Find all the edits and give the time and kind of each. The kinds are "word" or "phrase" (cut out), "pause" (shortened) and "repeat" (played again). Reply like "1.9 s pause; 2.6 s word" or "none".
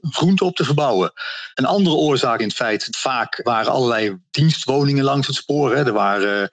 1.5 s pause; 2.4 s phrase; 2.9 s word; 3.4 s word